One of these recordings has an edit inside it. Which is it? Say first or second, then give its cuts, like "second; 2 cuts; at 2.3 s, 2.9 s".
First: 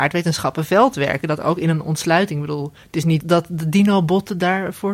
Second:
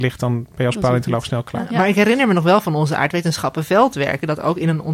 first; 1 cut; at 3.2 s